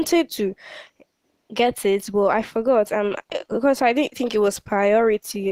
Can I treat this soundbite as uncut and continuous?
yes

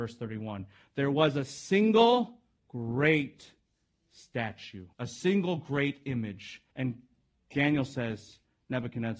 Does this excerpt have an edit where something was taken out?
yes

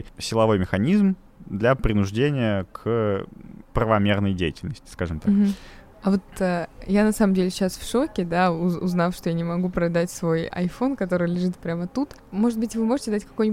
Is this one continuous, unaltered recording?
yes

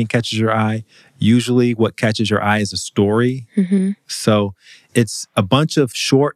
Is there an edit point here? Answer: no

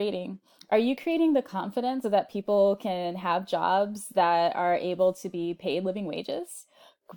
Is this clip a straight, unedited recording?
no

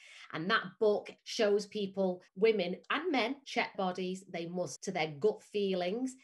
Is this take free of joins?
no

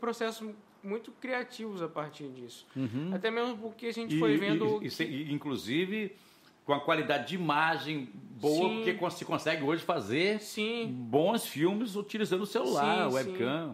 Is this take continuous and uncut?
yes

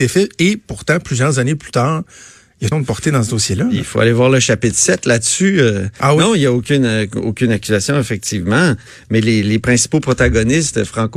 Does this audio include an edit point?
yes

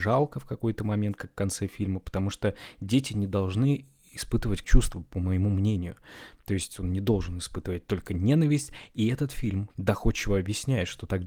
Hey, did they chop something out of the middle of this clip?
yes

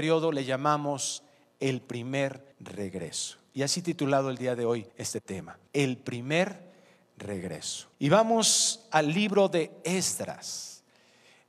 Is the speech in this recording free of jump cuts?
no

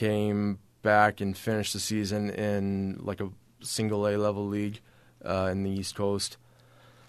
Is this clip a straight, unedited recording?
yes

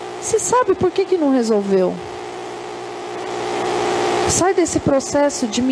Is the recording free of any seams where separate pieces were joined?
yes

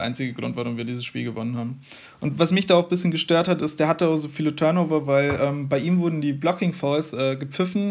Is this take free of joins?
yes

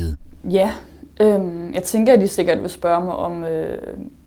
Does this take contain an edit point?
no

